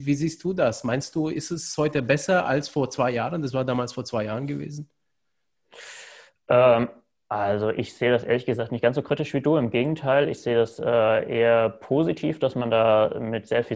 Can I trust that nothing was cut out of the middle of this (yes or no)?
yes